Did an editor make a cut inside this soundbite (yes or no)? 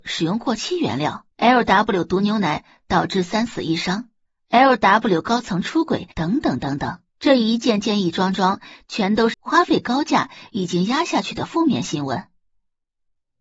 yes